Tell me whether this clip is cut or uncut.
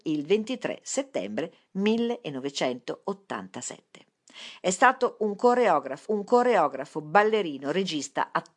cut